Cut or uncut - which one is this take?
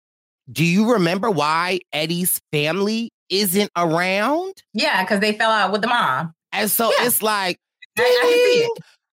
cut